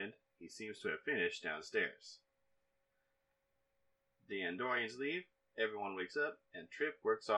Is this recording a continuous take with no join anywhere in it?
yes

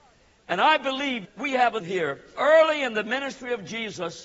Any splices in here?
yes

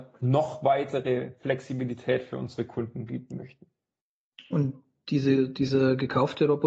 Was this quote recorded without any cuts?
yes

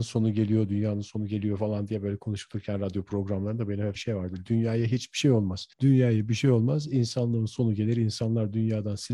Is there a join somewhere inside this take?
yes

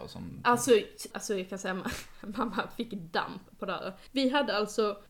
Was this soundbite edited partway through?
yes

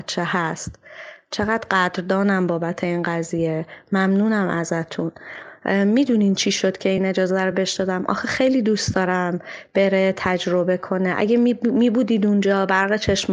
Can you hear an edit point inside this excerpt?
no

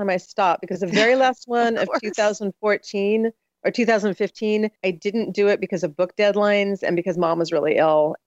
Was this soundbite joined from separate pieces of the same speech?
yes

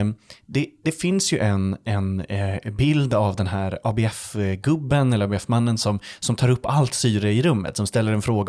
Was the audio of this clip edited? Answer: no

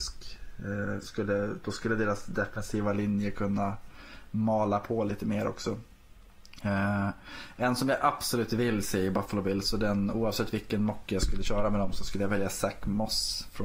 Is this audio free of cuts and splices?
yes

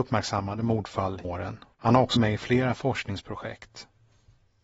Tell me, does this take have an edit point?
yes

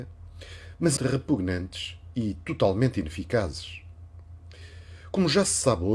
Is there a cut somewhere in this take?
yes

